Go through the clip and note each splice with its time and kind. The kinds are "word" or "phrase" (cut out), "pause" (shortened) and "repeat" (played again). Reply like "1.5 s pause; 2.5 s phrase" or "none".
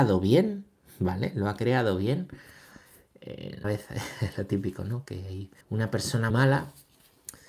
3.6 s phrase; 5.6 s pause; 6.3 s word